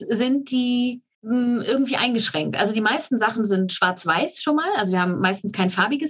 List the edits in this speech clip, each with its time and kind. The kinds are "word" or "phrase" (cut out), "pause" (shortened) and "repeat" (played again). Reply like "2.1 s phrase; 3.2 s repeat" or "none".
none